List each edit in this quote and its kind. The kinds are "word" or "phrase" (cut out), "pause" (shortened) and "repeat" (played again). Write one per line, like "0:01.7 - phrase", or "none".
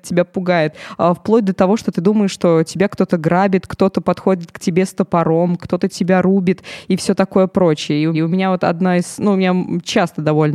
0:08.1 - repeat